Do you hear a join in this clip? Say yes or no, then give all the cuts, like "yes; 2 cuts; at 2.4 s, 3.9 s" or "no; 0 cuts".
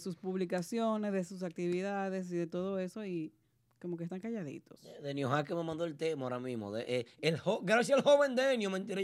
no; 0 cuts